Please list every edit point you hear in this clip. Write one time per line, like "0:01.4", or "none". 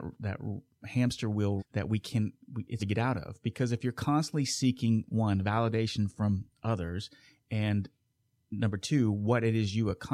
0:01.6
0:02.8